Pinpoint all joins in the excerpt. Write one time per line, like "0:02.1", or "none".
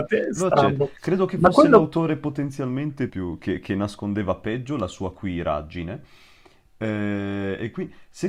0:03.1